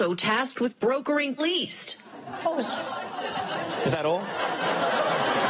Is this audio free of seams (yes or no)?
no